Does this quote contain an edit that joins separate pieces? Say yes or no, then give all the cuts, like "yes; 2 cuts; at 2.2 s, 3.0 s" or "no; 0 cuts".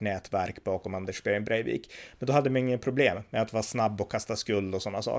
no; 0 cuts